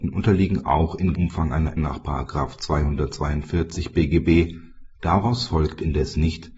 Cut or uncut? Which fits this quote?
cut